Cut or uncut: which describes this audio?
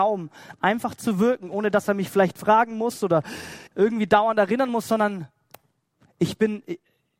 cut